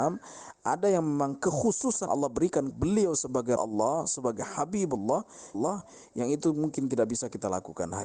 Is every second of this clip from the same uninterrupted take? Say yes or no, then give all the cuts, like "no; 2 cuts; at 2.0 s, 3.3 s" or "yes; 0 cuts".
no; 4 cuts; at 2.1 s, 2.7 s, 3.6 s, 5.5 s